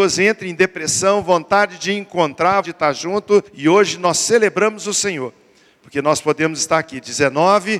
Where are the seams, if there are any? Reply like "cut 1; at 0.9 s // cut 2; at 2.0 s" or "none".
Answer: cut 1; at 2.6 s // cut 2; at 3.5 s